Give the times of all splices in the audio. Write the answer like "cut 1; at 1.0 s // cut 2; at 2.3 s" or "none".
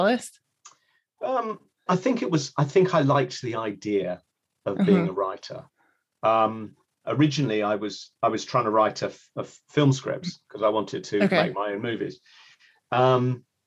cut 1; at 1.9 s // cut 2; at 7.0 s